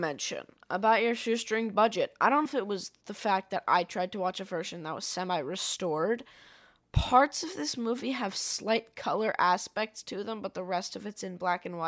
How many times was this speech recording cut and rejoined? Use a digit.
1